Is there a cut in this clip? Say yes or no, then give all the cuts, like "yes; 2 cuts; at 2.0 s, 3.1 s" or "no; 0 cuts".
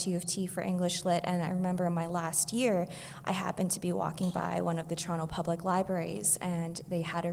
no; 0 cuts